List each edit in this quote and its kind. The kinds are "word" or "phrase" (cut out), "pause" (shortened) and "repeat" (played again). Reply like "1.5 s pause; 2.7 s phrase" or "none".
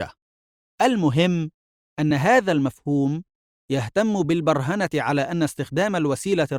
none